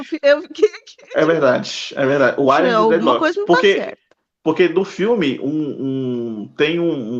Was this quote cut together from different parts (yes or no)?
no